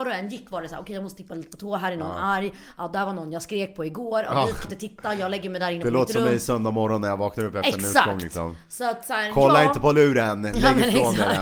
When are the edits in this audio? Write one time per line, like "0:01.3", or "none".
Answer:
0:04.6